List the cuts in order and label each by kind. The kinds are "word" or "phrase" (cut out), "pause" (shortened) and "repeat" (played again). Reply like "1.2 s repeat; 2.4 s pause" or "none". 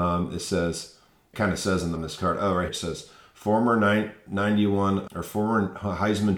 1.3 s word; 2.0 s word; 2.7 s word; 5.1 s word